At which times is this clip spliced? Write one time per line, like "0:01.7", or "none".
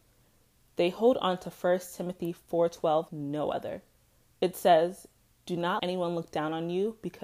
0:03.1
0:05.8